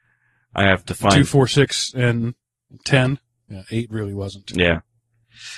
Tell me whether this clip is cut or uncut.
uncut